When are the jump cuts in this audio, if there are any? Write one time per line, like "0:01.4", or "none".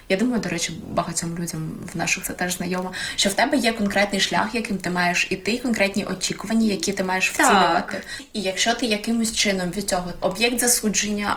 0:02.2
0:09.7
0:10.2